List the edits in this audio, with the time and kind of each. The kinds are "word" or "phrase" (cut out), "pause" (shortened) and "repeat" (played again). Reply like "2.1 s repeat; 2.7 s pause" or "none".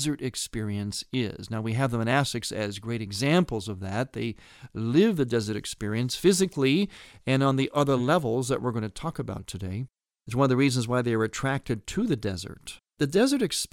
none